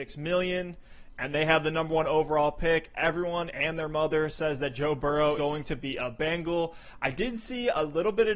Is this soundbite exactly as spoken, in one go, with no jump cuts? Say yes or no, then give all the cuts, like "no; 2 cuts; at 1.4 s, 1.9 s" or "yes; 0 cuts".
no; 1 cut; at 5.4 s